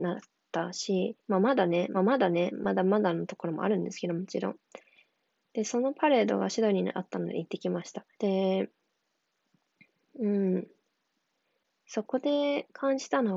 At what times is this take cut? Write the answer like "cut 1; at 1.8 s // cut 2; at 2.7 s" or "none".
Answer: cut 1; at 1.2 s // cut 2; at 1.9 s // cut 3; at 8.1 s